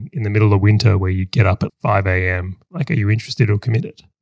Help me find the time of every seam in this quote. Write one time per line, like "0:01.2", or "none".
0:01.7